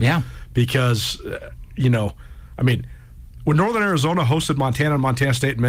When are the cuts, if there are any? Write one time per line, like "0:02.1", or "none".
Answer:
none